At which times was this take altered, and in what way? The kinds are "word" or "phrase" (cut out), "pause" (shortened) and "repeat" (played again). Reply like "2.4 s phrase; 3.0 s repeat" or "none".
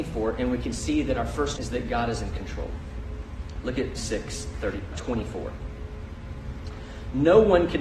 1.6 s word; 4.0 s word; 4.9 s word